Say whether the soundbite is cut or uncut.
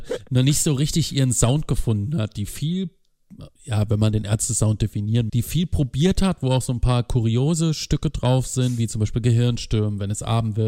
cut